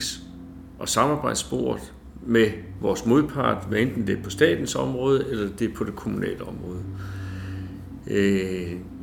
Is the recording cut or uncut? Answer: uncut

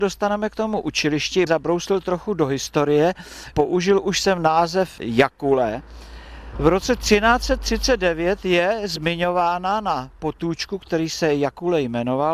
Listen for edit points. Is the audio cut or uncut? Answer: cut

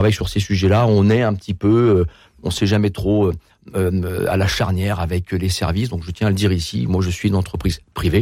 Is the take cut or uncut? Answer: uncut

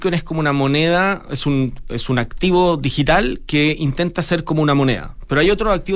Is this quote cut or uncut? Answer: uncut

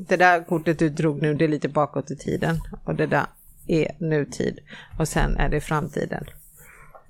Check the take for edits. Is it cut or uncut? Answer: uncut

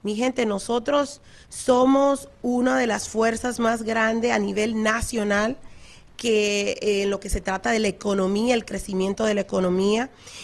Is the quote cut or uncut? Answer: uncut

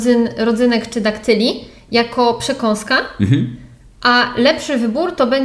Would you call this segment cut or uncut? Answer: uncut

